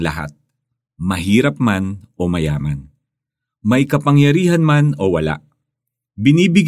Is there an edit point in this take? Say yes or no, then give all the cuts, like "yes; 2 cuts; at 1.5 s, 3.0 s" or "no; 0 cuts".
no; 0 cuts